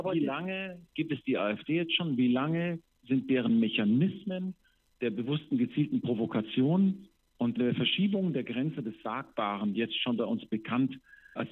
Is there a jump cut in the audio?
no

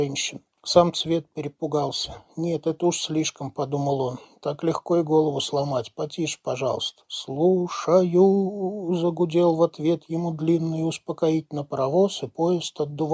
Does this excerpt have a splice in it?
no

